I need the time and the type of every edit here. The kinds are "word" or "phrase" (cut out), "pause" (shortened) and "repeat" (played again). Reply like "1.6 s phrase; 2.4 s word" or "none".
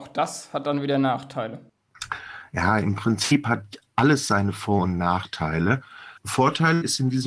6.2 s pause